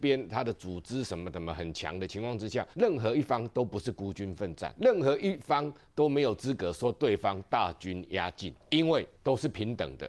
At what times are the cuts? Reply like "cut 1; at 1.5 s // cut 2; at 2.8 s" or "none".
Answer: cut 1; at 2.7 s // cut 2; at 4.8 s // cut 3; at 8.6 s // cut 4; at 9.2 s